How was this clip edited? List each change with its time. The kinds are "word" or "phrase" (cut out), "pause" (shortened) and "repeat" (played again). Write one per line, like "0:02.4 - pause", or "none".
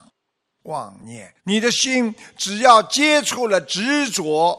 0:01.4 - pause